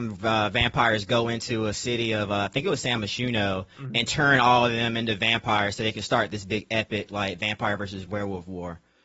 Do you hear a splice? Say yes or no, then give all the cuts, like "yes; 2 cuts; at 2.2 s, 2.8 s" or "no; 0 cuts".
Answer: no; 0 cuts